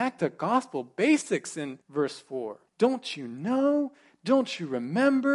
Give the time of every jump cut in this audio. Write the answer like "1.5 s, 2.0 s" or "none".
1.8 s, 2.7 s